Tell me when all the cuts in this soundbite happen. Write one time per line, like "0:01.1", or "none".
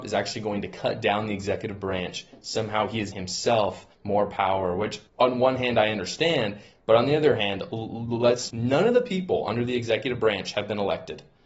0:03.1
0:03.9
0:05.1
0:08.5

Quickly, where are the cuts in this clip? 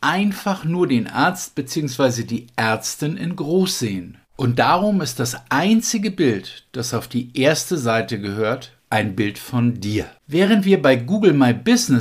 0:04.2
0:08.8
0:10.2

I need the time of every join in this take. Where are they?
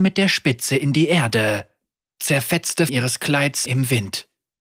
0:02.9
0:03.7

